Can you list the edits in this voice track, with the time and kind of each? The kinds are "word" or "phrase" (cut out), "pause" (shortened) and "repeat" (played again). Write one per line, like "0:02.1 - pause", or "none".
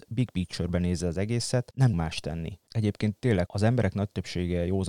0:01.9 - word
0:03.5 - word